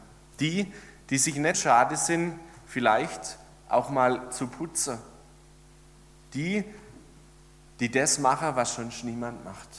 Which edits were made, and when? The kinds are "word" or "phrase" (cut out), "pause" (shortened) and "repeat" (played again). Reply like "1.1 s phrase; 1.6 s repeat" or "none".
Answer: 1.5 s word